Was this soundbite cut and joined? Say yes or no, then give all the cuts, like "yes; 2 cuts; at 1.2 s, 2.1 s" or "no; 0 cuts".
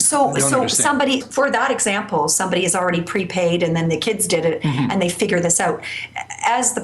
yes; 1 cut; at 1.2 s